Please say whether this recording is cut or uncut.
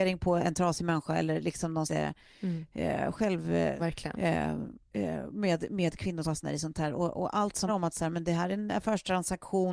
cut